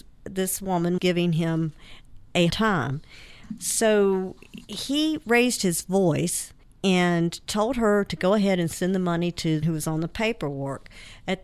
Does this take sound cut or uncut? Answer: cut